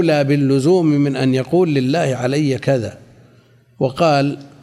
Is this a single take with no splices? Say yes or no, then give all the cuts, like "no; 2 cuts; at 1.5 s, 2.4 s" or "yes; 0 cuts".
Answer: yes; 0 cuts